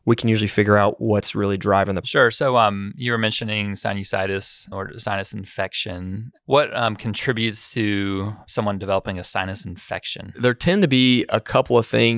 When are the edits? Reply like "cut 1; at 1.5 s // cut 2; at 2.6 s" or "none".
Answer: cut 1; at 2.0 s // cut 2; at 4.7 s